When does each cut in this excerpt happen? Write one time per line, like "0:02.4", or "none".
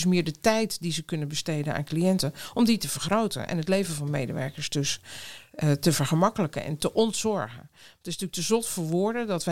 none